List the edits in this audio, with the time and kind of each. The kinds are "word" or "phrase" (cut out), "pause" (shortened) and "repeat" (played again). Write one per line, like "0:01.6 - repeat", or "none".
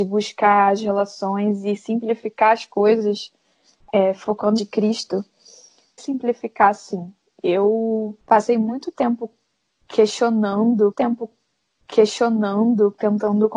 0:04.6 - phrase
0:06.0 - phrase
0:08.2 - pause
0:10.9 - repeat